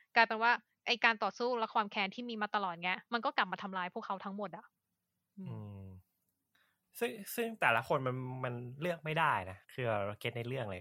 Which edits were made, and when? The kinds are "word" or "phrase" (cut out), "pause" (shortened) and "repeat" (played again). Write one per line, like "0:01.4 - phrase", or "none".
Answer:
0:03.0 - pause
0:09.6 - pause